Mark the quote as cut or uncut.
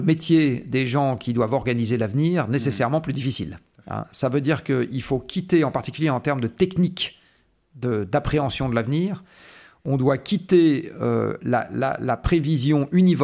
uncut